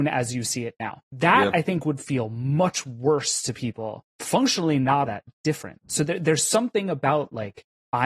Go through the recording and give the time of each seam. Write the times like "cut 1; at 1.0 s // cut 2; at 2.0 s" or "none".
cut 1; at 1.0 s // cut 2; at 4.1 s // cut 3; at 5.1 s